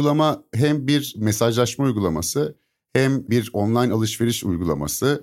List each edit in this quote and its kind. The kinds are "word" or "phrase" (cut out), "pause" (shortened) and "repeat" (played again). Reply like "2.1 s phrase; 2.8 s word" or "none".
none